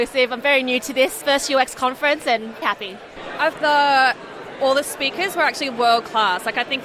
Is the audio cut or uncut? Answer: cut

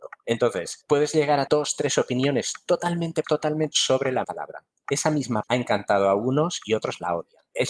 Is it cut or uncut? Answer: cut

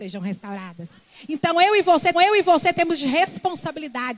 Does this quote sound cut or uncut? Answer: cut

